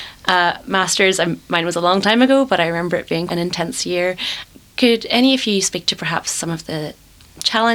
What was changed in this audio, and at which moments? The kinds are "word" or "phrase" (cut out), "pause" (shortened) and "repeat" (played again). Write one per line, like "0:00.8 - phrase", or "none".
0:03.3 - word